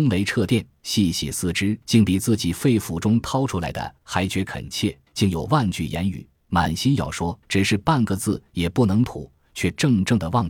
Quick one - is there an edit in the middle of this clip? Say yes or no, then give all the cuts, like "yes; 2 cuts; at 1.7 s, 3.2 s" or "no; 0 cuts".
yes; 3 cuts; at 1.8 s, 5.1 s, 7.4 s